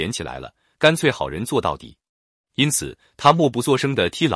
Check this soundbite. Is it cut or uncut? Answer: uncut